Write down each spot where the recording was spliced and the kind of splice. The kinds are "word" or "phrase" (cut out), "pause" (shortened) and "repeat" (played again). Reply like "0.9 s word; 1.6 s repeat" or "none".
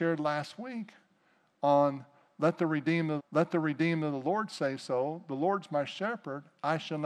3.2 s repeat

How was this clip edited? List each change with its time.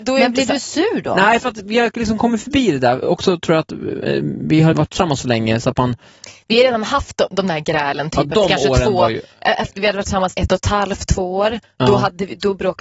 3.0 s word; 4.7 s word; 10.3 s word

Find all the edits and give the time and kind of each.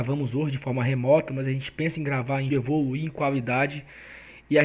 2.5 s word

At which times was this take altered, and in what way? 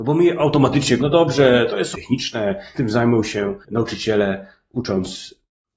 1.0 s word; 1.9 s word; 2.7 s word; 3.6 s pause

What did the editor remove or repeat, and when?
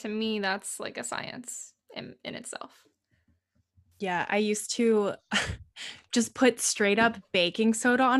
none

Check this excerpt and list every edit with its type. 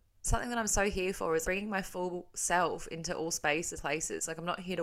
1.4 s word; 3.8 s word

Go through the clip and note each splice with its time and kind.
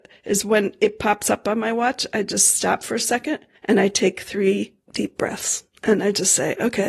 3.6 s pause

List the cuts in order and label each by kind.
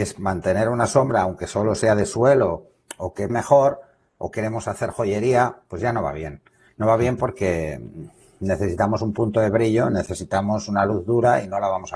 3.3 s word

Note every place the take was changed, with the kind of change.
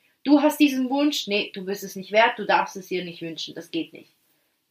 none

